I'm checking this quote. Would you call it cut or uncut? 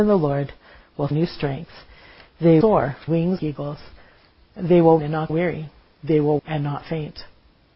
cut